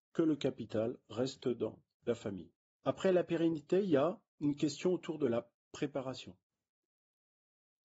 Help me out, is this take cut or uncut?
uncut